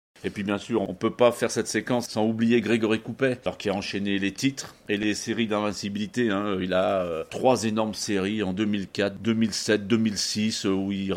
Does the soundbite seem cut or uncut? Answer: uncut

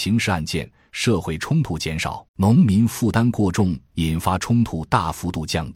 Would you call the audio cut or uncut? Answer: cut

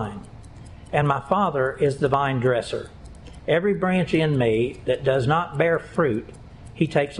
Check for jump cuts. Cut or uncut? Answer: uncut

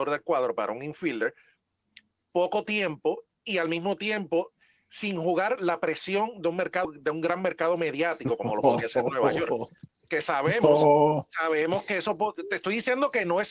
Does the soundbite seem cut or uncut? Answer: uncut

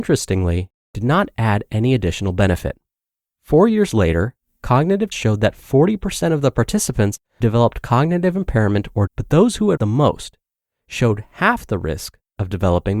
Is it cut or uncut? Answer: cut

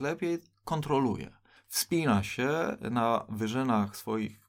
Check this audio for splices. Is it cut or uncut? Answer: uncut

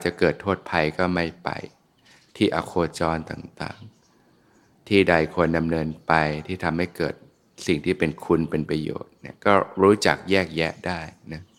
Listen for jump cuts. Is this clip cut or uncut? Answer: uncut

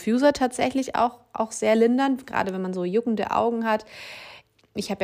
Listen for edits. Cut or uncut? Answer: uncut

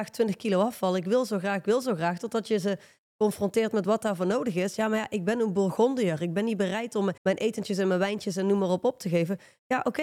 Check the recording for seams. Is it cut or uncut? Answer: cut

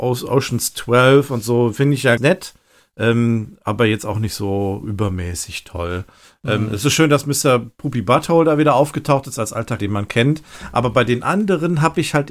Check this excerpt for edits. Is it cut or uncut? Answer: cut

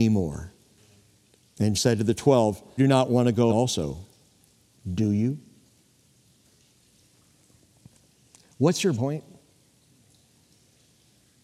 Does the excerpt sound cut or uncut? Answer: cut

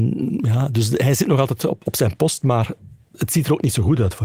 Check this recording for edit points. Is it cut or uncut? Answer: cut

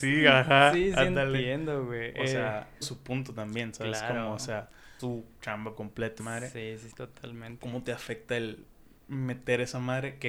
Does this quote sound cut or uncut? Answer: cut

